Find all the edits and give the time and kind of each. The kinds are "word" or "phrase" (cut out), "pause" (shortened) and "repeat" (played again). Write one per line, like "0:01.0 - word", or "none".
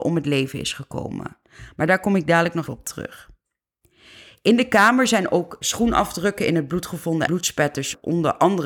0:02.7 - word
0:05.6 - word
0:07.3 - word